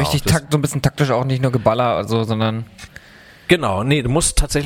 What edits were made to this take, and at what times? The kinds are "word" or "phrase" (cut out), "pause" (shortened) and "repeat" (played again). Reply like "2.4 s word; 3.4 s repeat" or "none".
none